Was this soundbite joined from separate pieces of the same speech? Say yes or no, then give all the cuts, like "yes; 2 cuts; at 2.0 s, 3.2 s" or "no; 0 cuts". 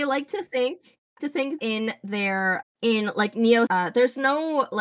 yes; 4 cuts; at 1.2 s, 1.6 s, 2.6 s, 3.7 s